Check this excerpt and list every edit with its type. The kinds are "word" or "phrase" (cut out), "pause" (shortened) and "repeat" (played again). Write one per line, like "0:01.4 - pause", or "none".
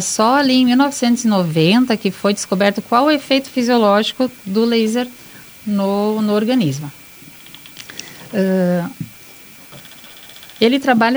none